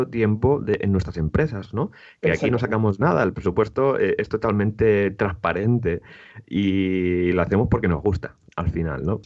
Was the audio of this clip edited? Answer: no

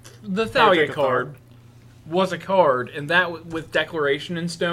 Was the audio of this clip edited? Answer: no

